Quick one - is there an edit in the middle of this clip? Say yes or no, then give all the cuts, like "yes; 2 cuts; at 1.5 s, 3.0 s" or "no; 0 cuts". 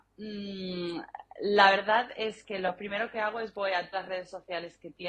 yes; 1 cut; at 3.9 s